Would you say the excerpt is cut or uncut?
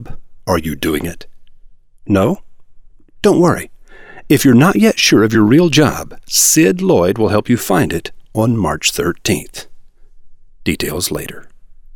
uncut